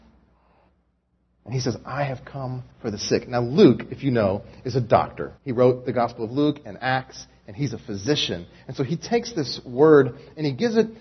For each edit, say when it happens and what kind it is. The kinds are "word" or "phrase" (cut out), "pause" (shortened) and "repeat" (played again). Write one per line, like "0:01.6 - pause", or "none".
0:02.7 - pause
0:05.4 - pause

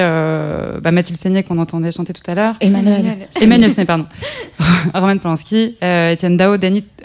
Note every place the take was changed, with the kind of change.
0:04.9 - word

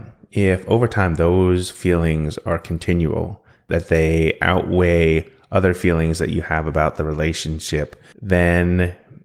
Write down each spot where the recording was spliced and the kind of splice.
0:08.1 - pause

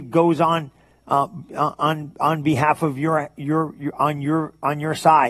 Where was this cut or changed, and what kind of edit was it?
none

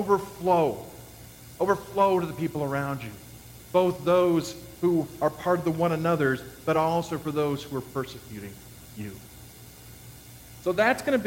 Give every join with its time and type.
none

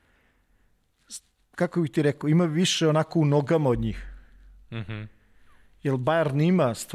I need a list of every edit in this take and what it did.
none

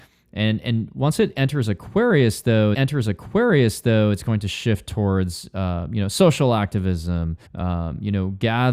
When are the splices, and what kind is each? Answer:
0:02.7 - repeat
0:07.5 - pause

